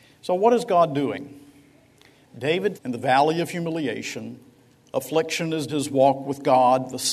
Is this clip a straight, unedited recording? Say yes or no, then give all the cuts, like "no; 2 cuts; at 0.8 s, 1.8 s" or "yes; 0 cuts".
no; 2 cuts; at 2.7 s, 5.7 s